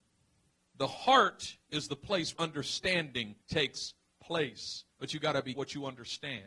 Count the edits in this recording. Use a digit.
5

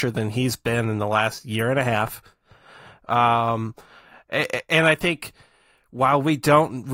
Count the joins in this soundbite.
0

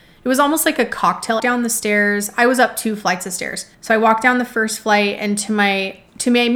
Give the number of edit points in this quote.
2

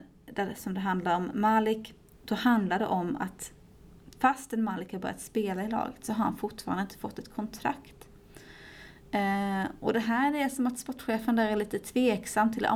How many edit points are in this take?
0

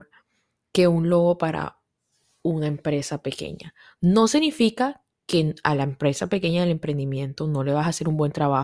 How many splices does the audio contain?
0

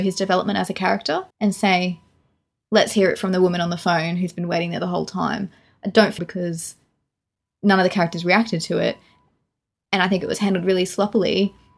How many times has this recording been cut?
2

